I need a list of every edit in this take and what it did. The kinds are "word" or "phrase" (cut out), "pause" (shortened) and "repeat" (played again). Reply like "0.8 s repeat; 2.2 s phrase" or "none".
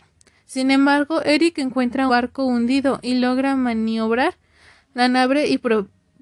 2.1 s word